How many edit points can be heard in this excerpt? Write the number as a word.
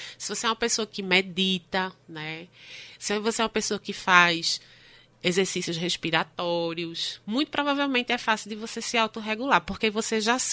two